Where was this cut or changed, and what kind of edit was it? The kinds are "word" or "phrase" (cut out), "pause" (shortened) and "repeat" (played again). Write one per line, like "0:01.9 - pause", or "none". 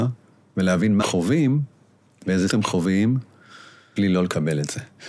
0:01.0 - word
0:02.5 - word
0:04.0 - word